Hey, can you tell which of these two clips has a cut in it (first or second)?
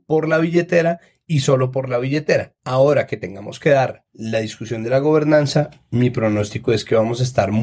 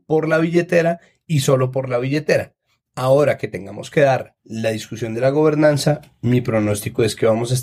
first